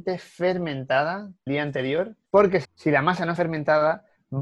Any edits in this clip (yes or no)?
yes